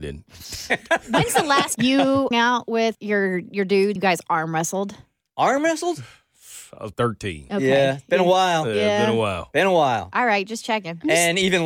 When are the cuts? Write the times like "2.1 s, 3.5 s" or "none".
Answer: 1.7 s, 2.3 s, 2.9 s, 4.0 s, 6.9 s